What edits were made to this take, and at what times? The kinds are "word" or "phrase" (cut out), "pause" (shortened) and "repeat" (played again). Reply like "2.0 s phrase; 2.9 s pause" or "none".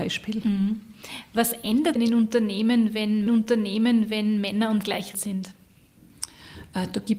2.0 s phrase; 3.3 s repeat; 4.8 s word; 5.1 s word